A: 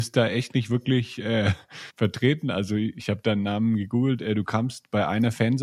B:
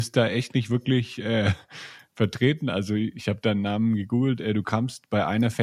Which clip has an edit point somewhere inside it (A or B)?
A